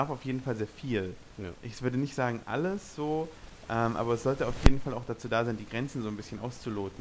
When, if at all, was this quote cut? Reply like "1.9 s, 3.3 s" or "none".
none